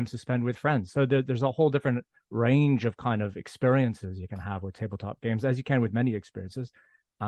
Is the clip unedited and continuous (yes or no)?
yes